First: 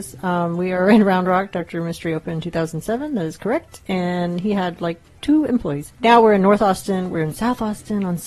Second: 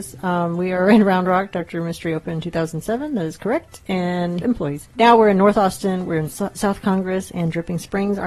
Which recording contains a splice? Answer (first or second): second